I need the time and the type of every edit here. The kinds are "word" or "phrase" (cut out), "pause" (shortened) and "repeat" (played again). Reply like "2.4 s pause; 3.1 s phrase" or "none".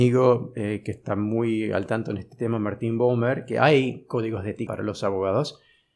4.7 s phrase